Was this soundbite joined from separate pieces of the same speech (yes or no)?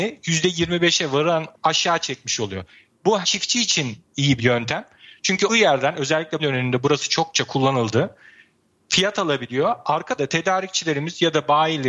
yes